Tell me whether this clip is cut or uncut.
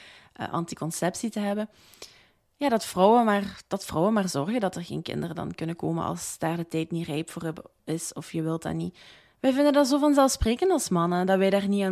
uncut